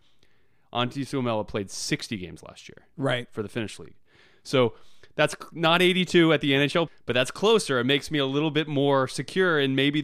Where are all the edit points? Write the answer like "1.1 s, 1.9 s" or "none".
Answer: 6.9 s